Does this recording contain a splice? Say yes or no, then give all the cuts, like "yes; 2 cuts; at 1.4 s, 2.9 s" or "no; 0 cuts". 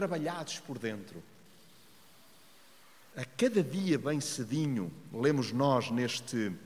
no; 0 cuts